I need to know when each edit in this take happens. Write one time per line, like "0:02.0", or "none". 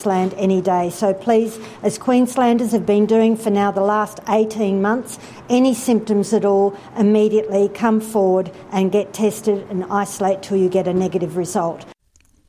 none